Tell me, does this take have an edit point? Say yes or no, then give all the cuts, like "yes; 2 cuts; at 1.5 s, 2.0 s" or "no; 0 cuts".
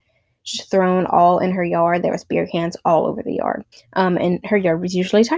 yes; 1 cut; at 3.7 s